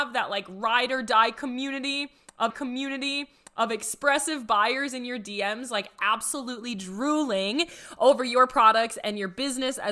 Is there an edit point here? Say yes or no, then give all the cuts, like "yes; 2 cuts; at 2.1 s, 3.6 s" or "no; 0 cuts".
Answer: yes; 1 cut; at 2.5 s